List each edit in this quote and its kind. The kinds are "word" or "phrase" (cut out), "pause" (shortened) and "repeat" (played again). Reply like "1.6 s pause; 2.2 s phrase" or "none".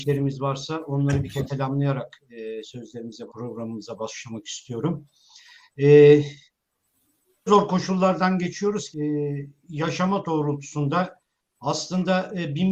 1.5 s word; 3.3 s word; 7.5 s word; 8.9 s word; 10.2 s word